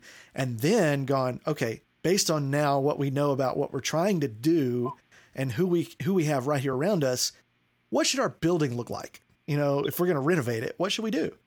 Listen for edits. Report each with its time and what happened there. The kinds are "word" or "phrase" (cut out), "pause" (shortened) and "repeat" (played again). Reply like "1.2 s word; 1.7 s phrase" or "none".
none